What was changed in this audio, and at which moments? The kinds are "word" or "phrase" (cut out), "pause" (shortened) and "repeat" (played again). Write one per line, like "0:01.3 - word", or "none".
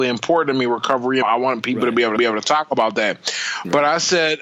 0:01.2 - phrase
0:02.2 - repeat